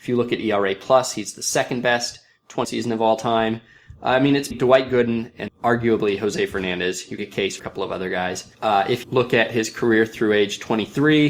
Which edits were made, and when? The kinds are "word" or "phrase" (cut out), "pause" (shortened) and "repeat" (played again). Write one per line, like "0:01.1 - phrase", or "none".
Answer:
0:02.6 - phrase
0:04.5 - word
0:05.5 - word
0:07.2 - phrase
0:07.6 - phrase
0:08.5 - pause
0:09.0 - word

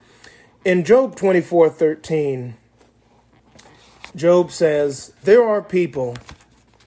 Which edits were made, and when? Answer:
0:04.1 - pause
0:05.2 - word

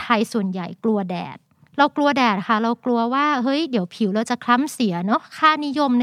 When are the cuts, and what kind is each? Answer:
0:01.5 - pause

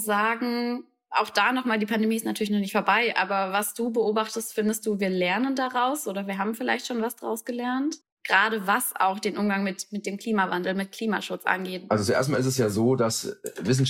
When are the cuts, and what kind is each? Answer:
0:08.0 - pause

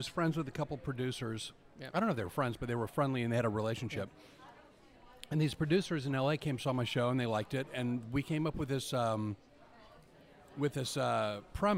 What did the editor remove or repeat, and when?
none

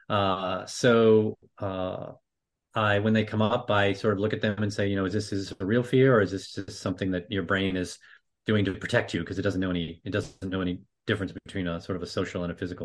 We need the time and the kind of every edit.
none

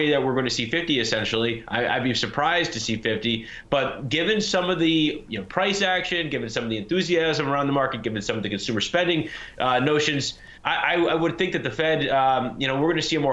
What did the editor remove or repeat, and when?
0:10.6 - pause

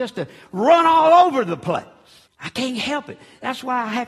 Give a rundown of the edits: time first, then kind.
0:02.3 - pause

